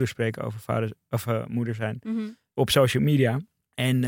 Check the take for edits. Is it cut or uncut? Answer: uncut